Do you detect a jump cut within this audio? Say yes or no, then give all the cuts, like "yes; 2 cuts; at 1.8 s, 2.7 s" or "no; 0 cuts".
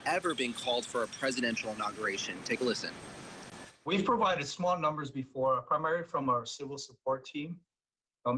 no; 0 cuts